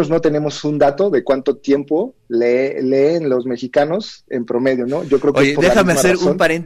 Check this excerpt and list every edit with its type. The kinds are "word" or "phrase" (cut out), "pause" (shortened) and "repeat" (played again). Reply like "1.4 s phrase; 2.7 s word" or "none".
2.2 s pause